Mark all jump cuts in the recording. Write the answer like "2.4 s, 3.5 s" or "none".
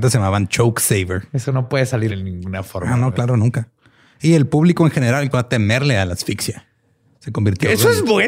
2.1 s, 5.3 s